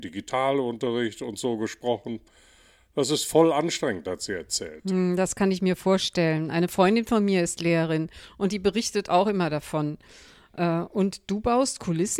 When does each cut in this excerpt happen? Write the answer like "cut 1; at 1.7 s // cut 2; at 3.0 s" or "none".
none